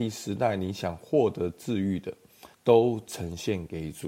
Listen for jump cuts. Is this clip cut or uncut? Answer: cut